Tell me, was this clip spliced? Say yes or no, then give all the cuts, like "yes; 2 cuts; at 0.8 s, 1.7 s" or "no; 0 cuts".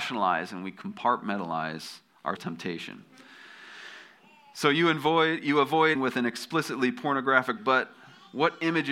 yes; 3 cuts; at 2.4 s, 5.9 s, 7.6 s